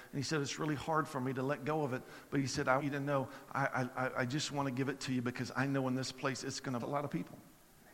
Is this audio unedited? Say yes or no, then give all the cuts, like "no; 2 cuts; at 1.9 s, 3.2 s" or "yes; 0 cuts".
no; 2 cuts; at 2.8 s, 6.8 s